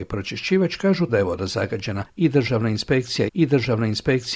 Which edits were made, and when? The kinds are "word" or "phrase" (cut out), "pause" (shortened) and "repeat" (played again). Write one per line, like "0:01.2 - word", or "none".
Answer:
0:01.1 - word
0:03.3 - repeat